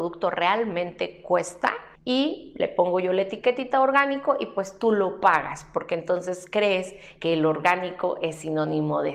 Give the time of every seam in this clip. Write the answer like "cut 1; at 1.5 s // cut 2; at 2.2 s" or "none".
cut 1; at 2.0 s

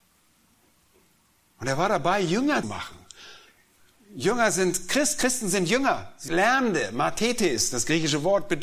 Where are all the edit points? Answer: cut 1; at 2.6 s // cut 2; at 6.3 s

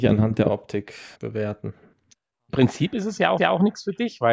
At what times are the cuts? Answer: cut 1; at 1.1 s // cut 2; at 3.4 s

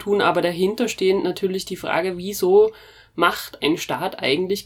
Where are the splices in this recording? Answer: none

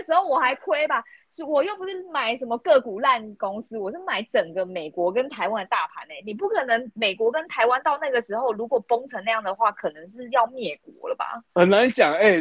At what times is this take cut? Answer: cut 1; at 11.5 s

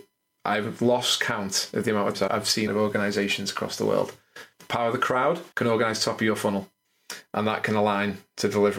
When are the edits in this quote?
cut 1; at 2.1 s // cut 2; at 2.7 s // cut 3; at 4.5 s // cut 4; at 5.5 s

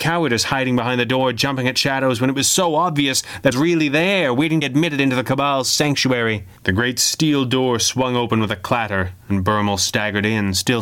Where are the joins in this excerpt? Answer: cut 1; at 3.5 s // cut 2; at 4.6 s // cut 3; at 6.6 s

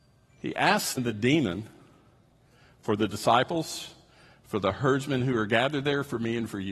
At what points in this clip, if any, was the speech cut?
cut 1; at 1.0 s

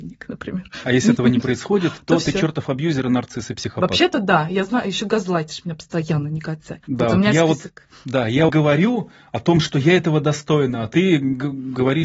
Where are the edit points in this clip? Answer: cut 1; at 6.8 s // cut 2; at 8.5 s

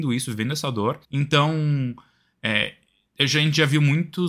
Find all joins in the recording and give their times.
cut 1; at 1.0 s

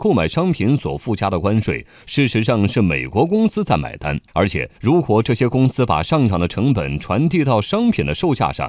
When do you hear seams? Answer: cut 1; at 4.3 s // cut 2; at 4.8 s

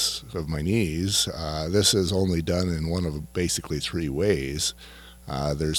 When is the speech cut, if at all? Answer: none

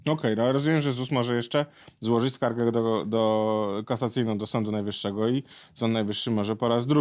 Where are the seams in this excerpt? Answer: none

